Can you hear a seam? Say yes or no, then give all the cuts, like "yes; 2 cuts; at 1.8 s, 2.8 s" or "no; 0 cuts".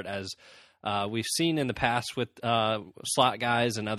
no; 0 cuts